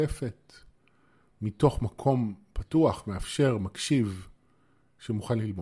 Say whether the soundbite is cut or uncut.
uncut